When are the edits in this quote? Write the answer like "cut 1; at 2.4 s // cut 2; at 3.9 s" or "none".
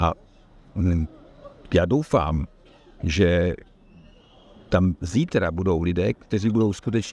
none